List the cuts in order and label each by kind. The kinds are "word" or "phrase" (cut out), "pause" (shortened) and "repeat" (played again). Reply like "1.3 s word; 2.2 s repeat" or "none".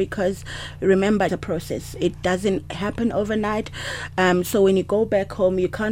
1.3 s phrase

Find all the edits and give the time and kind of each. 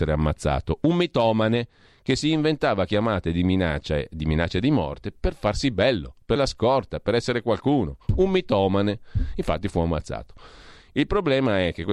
6.4 s word

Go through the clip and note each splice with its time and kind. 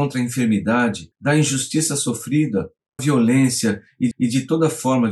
1.1 s pause; 3.0 s word; 4.1 s repeat

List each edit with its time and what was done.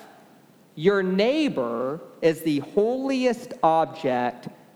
none

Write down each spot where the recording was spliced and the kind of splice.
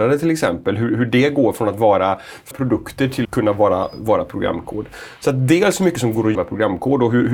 2.5 s word; 3.2 s word; 6.3 s word

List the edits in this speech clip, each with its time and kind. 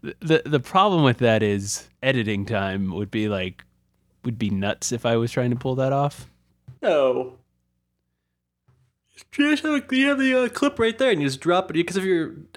1.9 s pause; 6.8 s pause

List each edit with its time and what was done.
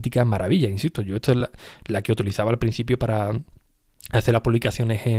none

